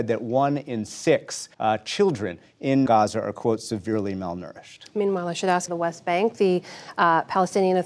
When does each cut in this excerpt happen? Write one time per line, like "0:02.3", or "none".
0:01.5
0:02.9
0:05.7